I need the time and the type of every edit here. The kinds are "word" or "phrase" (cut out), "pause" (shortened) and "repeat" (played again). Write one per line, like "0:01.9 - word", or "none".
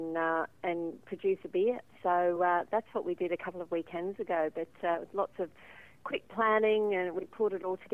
none